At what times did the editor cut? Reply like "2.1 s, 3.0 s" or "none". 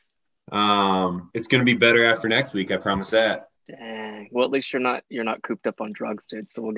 3.6 s